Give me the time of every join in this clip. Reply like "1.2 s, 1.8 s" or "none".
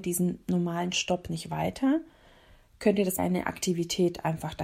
3.2 s